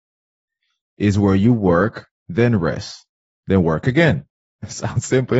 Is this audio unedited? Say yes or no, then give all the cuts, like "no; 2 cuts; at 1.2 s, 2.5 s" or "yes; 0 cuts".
no; 1 cut; at 2.2 s